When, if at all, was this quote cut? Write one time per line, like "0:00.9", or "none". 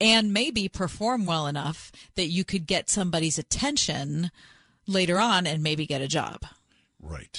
none